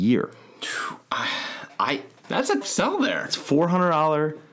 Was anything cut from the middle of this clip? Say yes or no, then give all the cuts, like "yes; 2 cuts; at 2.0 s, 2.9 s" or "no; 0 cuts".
yes; 2 cuts; at 2.2 s, 2.6 s